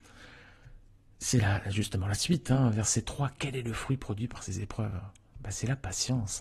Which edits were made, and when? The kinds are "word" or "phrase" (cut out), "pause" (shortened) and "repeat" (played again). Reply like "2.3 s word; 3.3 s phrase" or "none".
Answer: none

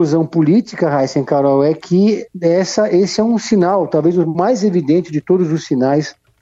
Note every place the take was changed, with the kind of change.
2.3 s pause

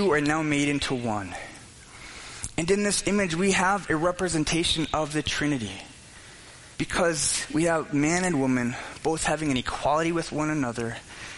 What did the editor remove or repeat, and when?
6.7 s pause

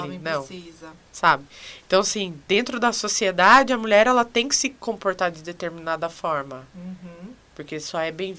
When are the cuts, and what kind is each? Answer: 2.4 s pause

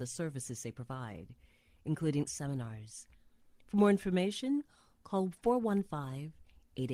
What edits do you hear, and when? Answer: 2.3 s phrase

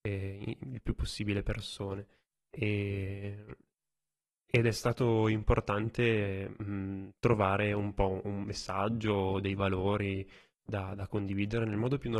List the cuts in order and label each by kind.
none

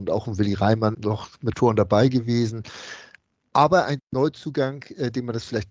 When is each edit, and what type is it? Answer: 0.9 s word; 1.5 s word; 4.0 s word

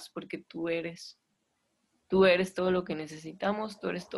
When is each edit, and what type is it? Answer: none

